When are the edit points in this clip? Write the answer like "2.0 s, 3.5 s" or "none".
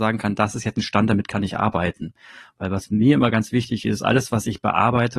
none